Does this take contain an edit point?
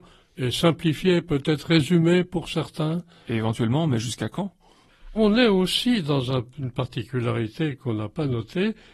yes; 1 cut; at 5.2 s

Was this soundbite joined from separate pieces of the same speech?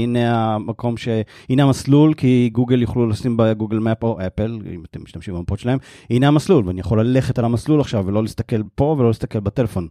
no; 0 cuts

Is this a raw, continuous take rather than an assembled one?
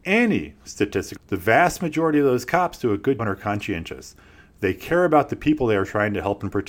no; 2 cuts; at 1.2 s, 3.2 s

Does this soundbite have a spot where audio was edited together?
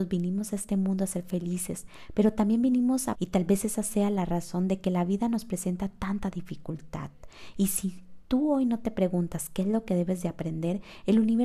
yes; 1 cut; at 3.1 s

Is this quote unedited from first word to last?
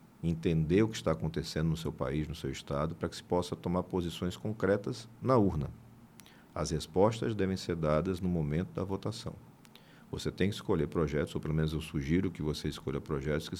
yes; 0 cuts

